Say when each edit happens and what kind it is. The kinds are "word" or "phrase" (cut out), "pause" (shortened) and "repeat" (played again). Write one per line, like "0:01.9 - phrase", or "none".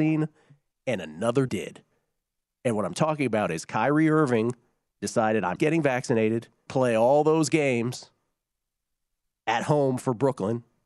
0:01.5 - word
0:05.6 - word
0:06.7 - word